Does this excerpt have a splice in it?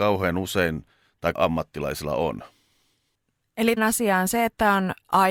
yes; 2 cuts; at 1.3 s, 3.8 s

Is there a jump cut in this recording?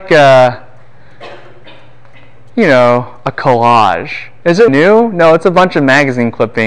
yes; 1 cut; at 4.7 s

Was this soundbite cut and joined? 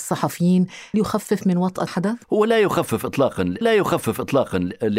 yes; 4 cuts; at 0.9 s, 1.9 s, 2.2 s, 3.6 s

